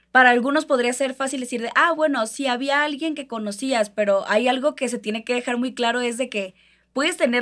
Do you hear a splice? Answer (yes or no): no